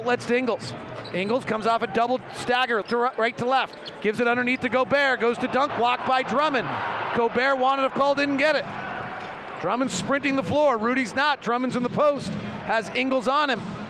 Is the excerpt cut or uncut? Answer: cut